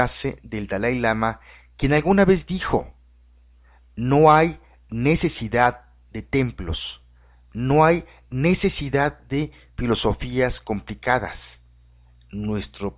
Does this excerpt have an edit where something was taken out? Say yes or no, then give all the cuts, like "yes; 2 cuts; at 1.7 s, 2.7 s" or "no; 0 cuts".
no; 0 cuts